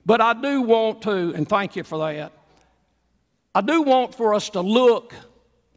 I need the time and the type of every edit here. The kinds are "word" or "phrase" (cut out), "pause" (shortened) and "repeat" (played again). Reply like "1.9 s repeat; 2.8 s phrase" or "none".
none